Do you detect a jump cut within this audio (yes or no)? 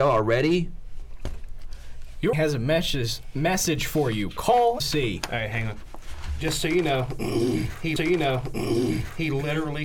yes